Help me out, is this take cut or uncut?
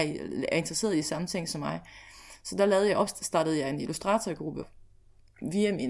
uncut